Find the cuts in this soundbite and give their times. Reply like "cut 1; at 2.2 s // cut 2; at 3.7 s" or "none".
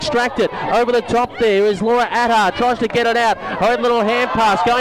none